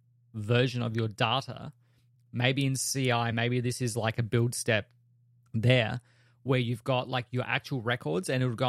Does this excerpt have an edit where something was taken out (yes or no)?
no